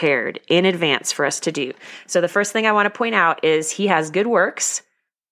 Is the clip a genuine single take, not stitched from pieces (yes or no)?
yes